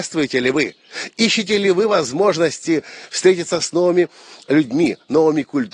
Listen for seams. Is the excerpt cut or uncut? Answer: uncut